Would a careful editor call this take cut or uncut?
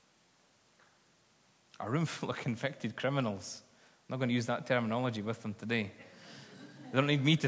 uncut